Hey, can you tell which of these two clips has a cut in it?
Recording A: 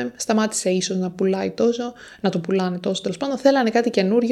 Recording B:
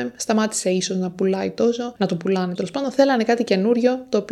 B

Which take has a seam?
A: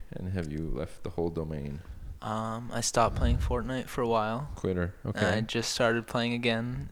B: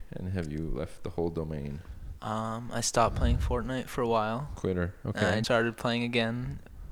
B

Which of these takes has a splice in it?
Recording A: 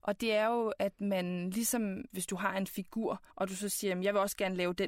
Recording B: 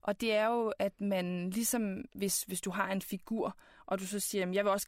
A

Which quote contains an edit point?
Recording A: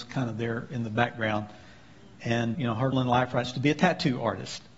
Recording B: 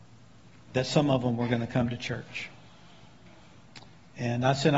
A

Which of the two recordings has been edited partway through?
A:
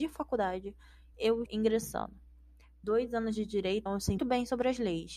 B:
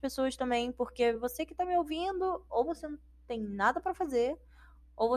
A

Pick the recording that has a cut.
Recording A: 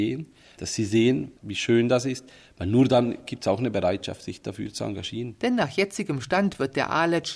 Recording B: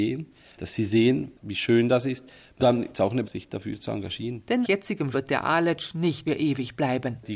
B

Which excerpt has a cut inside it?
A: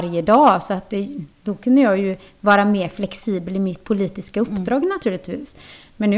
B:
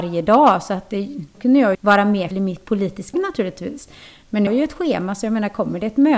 B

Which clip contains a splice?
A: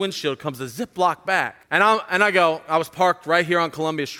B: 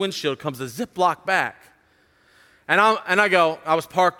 A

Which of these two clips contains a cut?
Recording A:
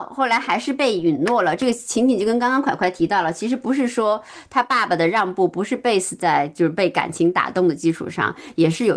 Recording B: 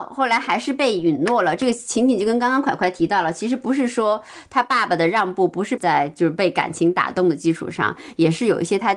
B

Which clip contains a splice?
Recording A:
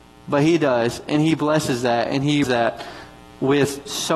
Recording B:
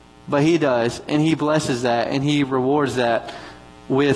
A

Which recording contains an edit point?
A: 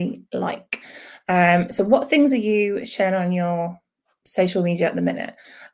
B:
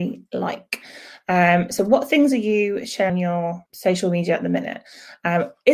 B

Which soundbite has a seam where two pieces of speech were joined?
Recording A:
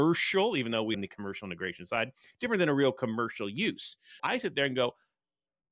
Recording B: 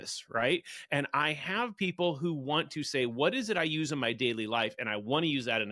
A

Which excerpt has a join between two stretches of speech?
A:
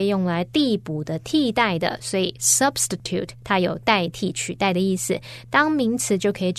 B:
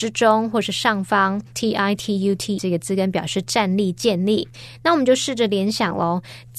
B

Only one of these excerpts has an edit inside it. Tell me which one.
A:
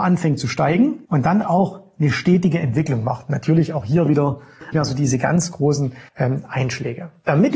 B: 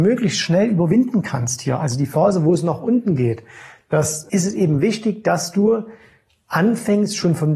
A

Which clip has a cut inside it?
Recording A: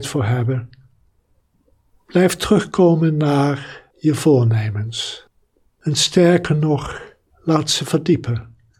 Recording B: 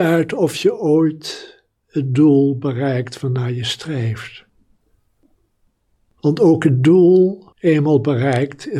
B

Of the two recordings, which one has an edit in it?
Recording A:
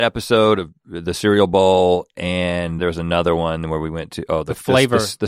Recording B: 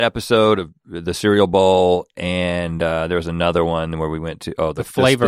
A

